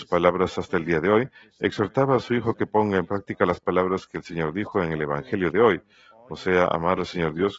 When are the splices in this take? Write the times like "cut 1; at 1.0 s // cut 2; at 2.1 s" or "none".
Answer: none